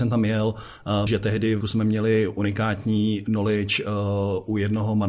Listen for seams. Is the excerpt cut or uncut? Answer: cut